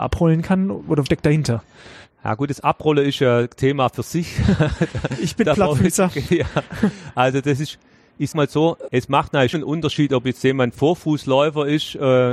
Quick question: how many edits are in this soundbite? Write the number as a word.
four